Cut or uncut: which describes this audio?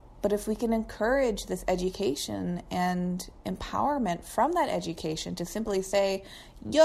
uncut